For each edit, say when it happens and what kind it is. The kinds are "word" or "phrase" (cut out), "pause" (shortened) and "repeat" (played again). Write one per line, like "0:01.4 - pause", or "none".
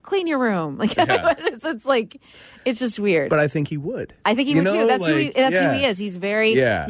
none